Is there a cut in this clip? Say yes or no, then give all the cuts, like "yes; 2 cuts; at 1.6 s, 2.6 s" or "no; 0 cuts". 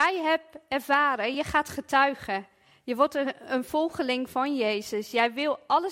no; 0 cuts